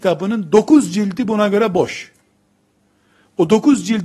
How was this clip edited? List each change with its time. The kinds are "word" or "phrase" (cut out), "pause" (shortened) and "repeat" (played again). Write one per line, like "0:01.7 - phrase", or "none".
none